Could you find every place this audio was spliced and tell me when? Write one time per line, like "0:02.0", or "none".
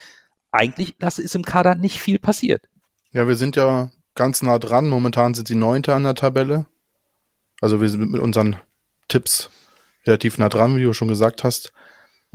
none